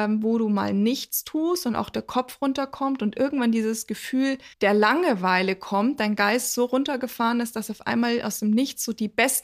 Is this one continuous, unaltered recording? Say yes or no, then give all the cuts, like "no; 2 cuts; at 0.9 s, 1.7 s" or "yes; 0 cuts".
no; 1 cut; at 4.5 s